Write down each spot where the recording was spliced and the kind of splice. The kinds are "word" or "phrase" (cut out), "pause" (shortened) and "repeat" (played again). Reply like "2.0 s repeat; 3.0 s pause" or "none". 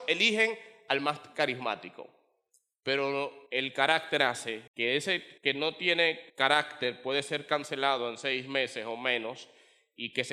3.5 s pause; 4.7 s pause; 5.4 s pause; 6.3 s pause